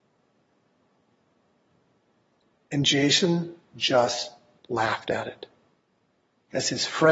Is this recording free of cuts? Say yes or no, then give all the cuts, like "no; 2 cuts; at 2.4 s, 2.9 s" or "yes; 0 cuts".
yes; 0 cuts